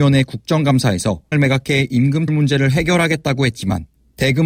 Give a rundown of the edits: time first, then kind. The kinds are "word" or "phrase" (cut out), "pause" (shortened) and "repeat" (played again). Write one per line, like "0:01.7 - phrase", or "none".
0:01.3 - word
0:02.3 - word